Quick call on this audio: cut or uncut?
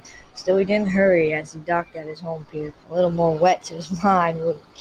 cut